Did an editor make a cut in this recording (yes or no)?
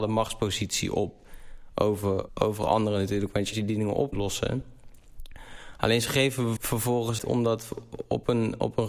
yes